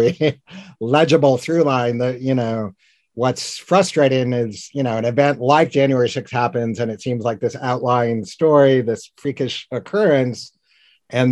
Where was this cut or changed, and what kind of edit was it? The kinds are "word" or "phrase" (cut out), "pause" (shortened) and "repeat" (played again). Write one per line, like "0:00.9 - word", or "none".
none